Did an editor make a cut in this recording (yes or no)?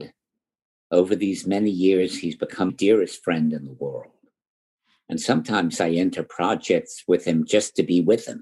yes